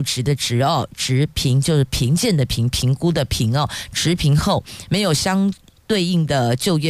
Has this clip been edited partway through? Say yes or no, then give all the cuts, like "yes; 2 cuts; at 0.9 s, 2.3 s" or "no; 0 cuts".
no; 0 cuts